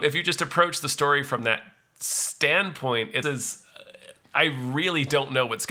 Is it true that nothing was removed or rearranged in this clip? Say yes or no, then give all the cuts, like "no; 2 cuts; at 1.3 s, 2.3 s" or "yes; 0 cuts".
no; 1 cut; at 3.2 s